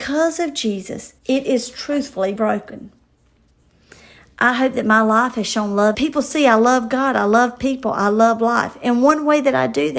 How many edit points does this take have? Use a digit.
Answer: 3